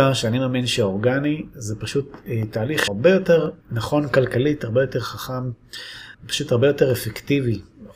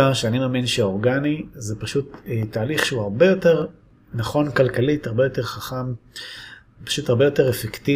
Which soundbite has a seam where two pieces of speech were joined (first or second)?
first